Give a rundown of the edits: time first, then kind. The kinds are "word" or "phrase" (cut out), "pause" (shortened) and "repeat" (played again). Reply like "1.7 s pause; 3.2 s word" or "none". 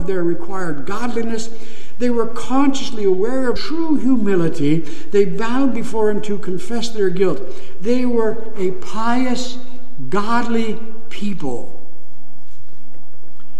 3.6 s phrase